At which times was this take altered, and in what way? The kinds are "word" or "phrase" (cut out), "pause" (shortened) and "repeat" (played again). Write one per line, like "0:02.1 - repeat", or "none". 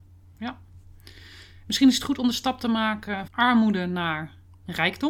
0:03.3 - word